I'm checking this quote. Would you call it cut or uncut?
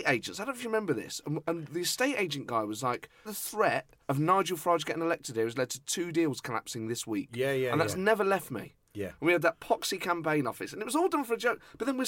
cut